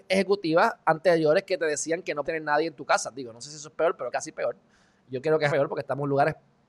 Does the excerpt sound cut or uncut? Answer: cut